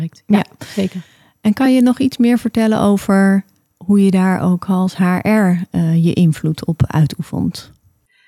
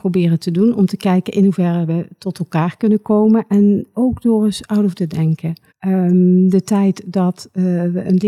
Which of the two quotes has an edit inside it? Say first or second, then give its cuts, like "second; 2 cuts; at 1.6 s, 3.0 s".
second; 3 cuts; at 3.9 s, 4.9 s, 5.7 s